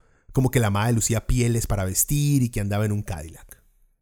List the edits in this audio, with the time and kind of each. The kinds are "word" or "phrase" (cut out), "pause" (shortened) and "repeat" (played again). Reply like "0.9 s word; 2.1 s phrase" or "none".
none